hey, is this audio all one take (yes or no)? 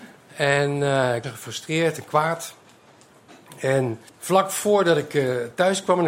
no